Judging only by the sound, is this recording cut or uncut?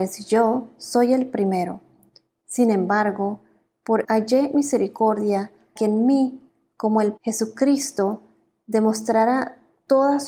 cut